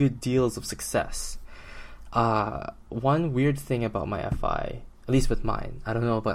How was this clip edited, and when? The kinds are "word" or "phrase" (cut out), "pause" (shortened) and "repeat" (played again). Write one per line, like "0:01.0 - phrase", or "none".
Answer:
none